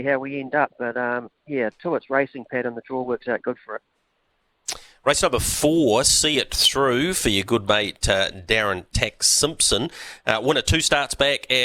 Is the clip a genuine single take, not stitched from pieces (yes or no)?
yes